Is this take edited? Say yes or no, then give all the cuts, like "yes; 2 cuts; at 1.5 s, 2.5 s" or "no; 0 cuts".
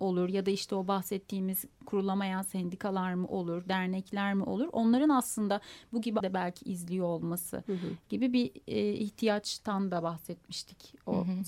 yes; 1 cut; at 6.2 s